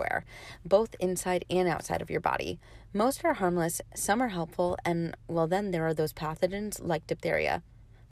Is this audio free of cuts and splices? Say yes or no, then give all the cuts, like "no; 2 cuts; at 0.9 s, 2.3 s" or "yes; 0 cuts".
yes; 0 cuts